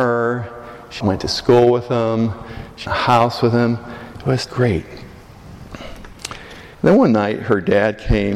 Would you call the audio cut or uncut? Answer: cut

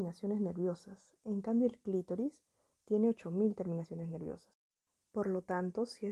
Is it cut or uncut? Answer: uncut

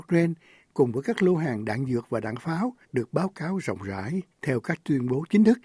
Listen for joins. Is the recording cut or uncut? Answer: cut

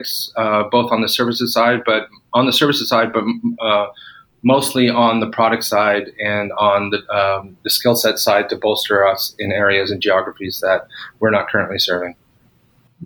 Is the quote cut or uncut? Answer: uncut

